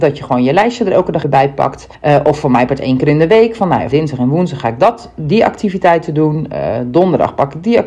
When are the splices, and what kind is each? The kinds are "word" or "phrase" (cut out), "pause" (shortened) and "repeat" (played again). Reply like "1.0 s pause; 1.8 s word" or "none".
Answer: 1.2 s word; 1.9 s pause; 3.9 s phrase